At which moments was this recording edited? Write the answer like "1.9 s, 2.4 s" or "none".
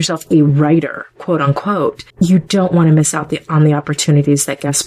2.1 s